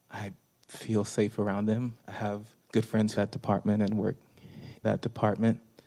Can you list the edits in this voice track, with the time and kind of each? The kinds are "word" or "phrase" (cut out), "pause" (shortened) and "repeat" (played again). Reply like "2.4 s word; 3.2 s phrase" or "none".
2.0 s pause; 2.6 s pause; 3.2 s phrase; 4.8 s word